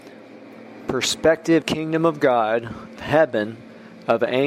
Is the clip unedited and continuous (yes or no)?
no